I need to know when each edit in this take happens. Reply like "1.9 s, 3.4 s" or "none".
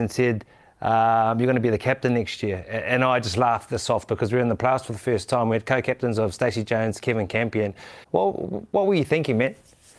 8.0 s